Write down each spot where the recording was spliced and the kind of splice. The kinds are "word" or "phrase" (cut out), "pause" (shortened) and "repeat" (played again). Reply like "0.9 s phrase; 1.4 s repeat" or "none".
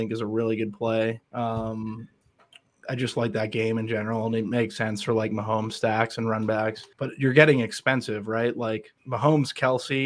1.2 s pause; 6.9 s pause; 9.0 s pause